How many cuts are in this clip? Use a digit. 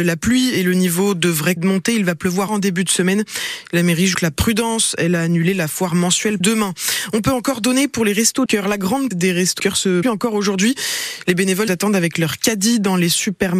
9